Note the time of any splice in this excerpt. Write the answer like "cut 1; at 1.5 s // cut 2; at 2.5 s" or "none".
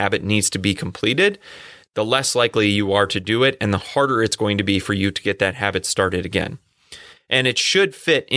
none